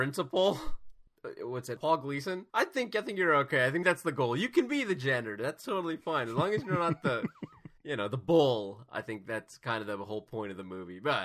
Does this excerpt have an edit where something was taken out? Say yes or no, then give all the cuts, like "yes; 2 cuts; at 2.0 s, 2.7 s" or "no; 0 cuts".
yes; 4 cuts; at 1.8 s, 2.5 s, 3.8 s, 7.8 s